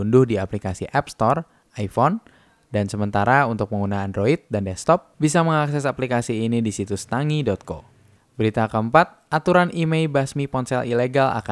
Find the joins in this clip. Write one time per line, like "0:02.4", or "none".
none